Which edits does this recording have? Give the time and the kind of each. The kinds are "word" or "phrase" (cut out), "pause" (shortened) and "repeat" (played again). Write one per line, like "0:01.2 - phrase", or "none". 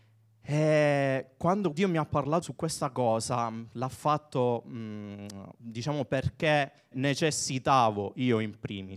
0:01.7 - word
0:02.4 - word
0:06.9 - word